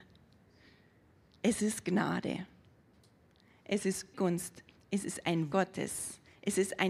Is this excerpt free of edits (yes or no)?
no